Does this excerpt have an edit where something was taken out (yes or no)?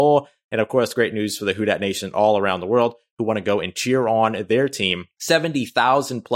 no